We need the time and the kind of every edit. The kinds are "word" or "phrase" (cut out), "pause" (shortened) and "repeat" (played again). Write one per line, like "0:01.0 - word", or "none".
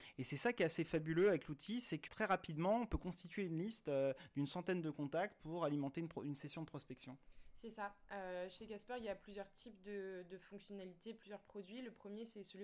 0:02.1 - word